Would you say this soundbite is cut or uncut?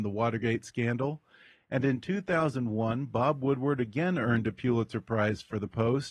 uncut